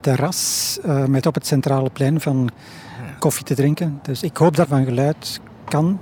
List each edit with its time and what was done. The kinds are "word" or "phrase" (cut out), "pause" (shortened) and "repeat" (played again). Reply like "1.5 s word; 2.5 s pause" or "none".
1.2 s word; 2.5 s word; 4.6 s word